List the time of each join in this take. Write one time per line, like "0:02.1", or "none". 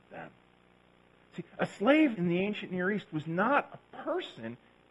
0:02.1